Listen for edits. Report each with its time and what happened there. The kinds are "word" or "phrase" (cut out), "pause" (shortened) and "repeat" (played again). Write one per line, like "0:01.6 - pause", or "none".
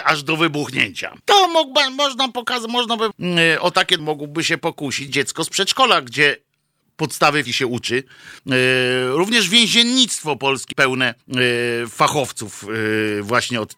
0:01.2 - pause
0:03.1 - word
0:04.0 - word
0:05.1 - word
0:07.5 - word
0:08.4 - pause
0:10.7 - word
0:11.2 - pause

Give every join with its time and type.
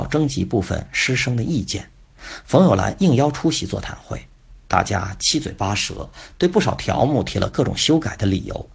0:04.6 - pause

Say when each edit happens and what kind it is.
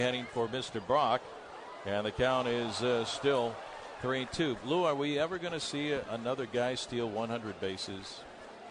none

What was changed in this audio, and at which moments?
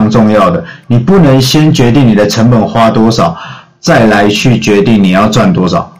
none

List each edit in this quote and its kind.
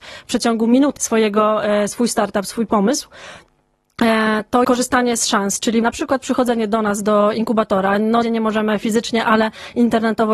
0:01.0 - word
0:04.6 - word
0:05.8 - word
0:08.2 - phrase

